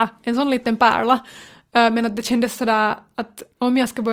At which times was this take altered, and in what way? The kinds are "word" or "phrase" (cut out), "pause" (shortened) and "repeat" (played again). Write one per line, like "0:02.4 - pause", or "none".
none